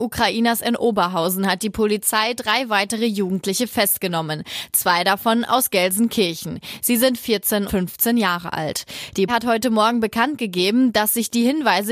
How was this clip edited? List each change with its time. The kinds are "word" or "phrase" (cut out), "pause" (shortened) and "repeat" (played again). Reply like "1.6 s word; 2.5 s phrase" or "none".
7.7 s word; 9.3 s word